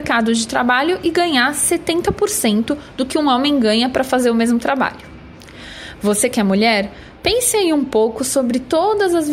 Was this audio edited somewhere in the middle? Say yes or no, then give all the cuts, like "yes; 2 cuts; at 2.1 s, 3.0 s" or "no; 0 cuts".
no; 0 cuts